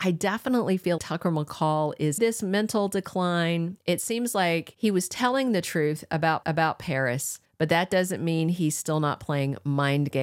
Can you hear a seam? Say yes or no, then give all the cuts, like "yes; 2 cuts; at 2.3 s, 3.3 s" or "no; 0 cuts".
yes; 3 cuts; at 1.0 s, 2.2 s, 6.4 s